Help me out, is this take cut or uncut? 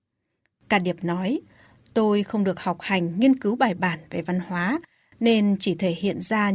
uncut